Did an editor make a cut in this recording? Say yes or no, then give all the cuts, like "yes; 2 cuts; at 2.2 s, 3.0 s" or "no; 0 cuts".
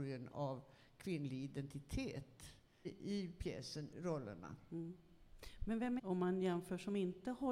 yes; 3 cuts; at 2.8 s, 3.9 s, 6.0 s